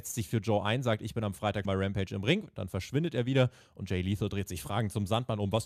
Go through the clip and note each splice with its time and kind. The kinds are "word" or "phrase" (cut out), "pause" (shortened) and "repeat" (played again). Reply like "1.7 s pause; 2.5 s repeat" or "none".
1.6 s word

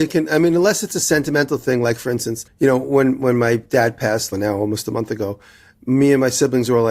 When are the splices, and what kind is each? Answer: 2.5 s pause; 4.3 s phrase

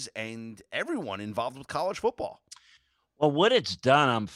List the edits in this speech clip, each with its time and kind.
none

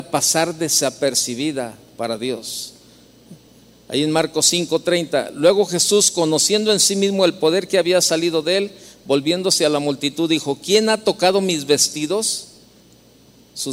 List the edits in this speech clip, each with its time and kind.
3.5 s pause

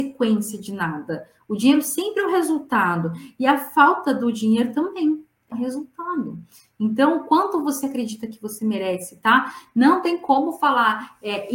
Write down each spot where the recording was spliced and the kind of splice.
5.5 s word

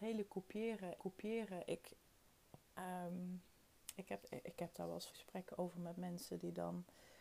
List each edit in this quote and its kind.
1.0 s repeat; 3.7 s pause; 4.2 s word; 5.1 s word

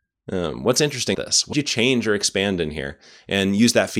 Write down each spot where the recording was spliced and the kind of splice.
1.1 s word; 1.5 s word

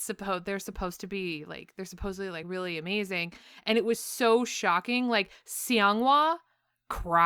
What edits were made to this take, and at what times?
none

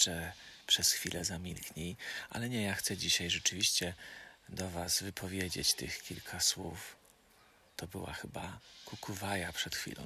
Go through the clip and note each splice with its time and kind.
none

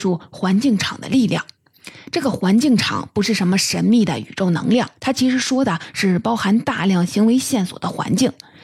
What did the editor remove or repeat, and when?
5.0 s pause

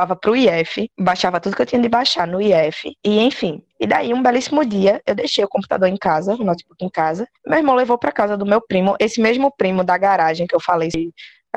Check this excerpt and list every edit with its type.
0.9 s pause; 3.0 s pause; 3.7 s pause; 7.4 s pause

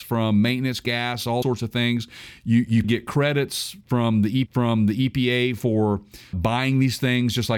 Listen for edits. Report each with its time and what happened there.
1.4 s word; 2.8 s word; 4.5 s repeat; 6.3 s word

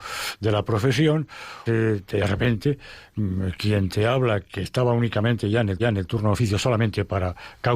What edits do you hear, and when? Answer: 1.7 s word; 5.8 s repeat

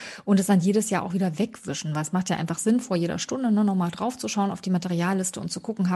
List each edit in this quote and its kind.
none

